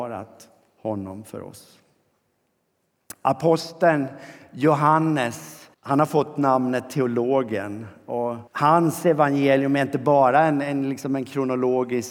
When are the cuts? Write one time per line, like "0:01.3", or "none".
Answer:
0:05.7
0:08.5

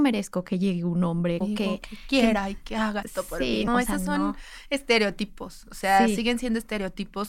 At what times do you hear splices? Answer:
0:01.4
0:03.0
0:03.7

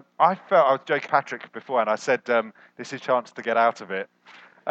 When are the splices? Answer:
0:01.1
0:03.0

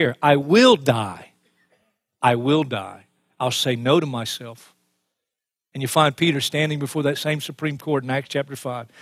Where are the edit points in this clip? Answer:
none

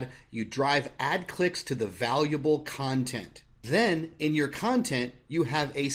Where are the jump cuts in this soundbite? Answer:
none

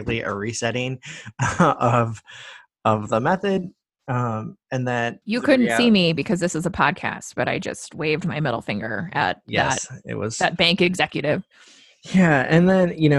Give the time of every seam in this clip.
0:05.2

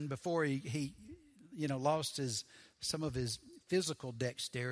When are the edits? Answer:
none

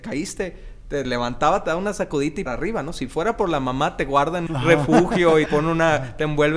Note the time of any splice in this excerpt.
0:01.0
0:02.5
0:04.5
0:05.5

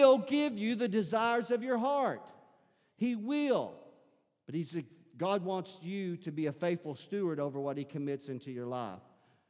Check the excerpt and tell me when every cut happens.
none

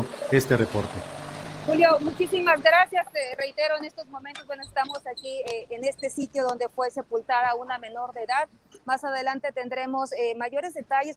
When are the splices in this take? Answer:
none

